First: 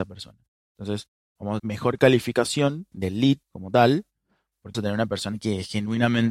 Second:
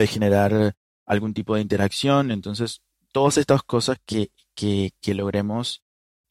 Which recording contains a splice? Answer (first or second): first